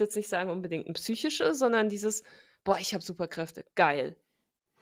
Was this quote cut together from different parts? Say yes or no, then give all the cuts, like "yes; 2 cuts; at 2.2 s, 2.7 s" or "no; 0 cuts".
no; 0 cuts